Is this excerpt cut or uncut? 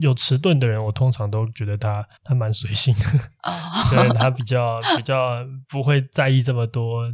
cut